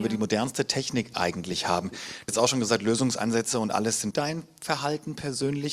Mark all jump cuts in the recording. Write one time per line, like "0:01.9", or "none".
0:02.3
0:04.1